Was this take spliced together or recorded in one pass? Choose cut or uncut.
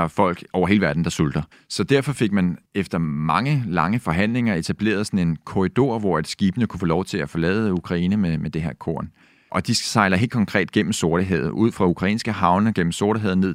cut